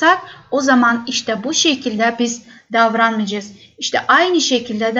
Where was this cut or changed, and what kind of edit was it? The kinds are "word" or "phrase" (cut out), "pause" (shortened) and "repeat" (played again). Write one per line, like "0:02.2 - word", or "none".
none